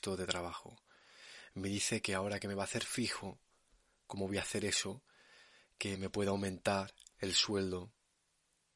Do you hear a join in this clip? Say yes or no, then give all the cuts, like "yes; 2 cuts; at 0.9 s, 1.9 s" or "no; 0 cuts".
no; 0 cuts